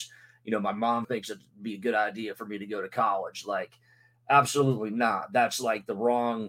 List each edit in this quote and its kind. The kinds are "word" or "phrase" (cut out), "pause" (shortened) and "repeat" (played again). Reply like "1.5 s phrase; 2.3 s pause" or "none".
1.0 s word